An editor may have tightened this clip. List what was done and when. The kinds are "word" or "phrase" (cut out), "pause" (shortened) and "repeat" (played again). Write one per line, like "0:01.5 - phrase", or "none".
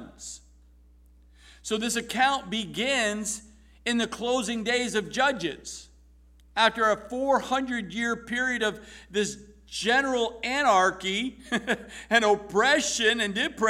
none